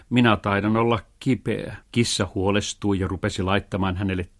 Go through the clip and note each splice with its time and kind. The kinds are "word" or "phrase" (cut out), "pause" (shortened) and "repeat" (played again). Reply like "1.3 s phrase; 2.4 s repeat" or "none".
1.8 s pause